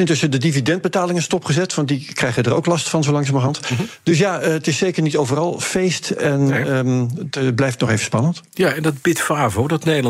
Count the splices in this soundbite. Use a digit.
0